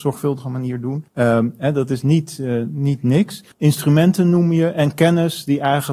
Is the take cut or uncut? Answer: cut